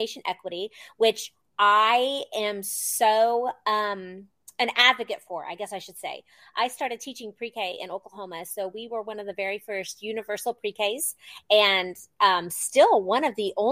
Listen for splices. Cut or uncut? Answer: uncut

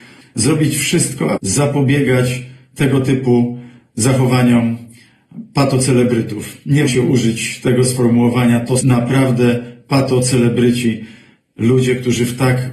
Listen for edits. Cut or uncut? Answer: cut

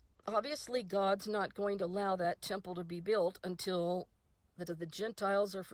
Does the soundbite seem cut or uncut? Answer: cut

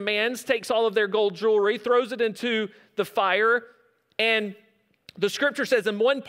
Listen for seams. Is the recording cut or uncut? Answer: uncut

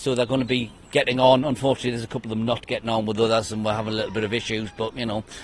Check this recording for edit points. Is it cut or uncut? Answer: uncut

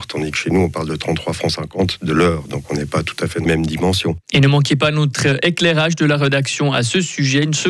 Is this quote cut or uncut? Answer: cut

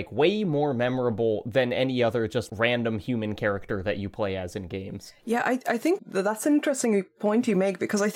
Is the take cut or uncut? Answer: cut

